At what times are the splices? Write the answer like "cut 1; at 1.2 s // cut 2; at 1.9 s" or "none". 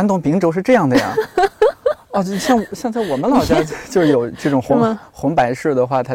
none